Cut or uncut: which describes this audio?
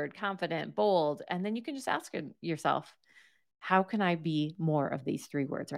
uncut